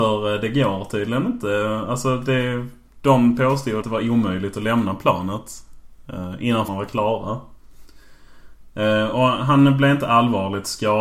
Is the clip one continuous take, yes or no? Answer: no